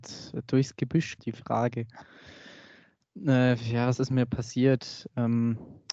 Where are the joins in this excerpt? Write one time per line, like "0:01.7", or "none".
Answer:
0:01.2